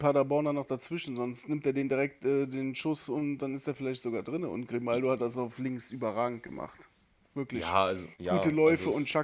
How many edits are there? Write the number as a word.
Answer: one